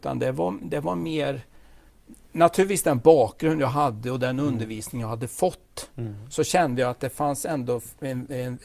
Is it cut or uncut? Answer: uncut